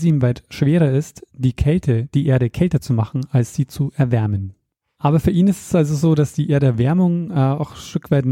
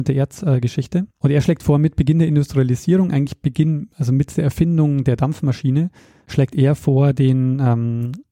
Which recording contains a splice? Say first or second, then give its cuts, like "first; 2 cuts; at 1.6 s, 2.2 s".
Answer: second; 2 cuts; at 1.1 s, 6.0 s